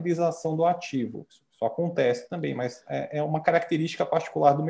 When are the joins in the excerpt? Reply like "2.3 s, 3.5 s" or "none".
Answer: none